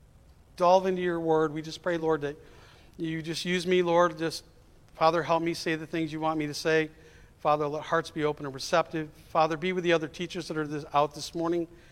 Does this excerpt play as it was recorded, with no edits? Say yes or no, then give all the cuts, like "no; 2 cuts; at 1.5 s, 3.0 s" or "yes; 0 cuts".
yes; 0 cuts